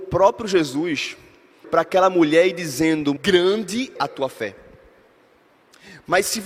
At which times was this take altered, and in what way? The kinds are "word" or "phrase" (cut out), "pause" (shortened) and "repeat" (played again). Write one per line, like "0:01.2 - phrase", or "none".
0:01.6 - word
0:03.2 - word
0:04.0 - word